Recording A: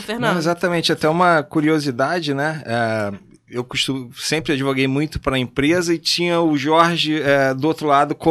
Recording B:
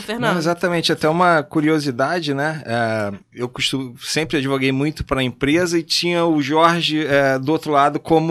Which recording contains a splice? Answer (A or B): B